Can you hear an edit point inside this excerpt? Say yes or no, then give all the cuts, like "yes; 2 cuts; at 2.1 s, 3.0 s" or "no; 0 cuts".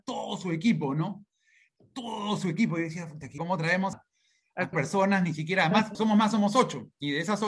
yes; 4 cuts; at 3.4 s, 3.9 s, 4.7 s, 5.9 s